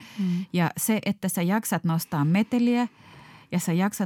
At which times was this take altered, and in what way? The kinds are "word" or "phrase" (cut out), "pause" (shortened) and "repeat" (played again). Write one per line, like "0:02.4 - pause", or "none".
none